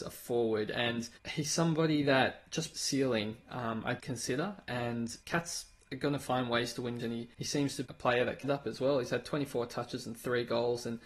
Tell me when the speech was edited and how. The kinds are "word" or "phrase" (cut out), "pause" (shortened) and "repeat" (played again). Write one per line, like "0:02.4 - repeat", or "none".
0:01.2 - pause
0:02.7 - phrase
0:04.0 - word
0:05.2 - pause
0:07.0 - word
0:07.3 - pause
0:07.8 - word
0:08.4 - word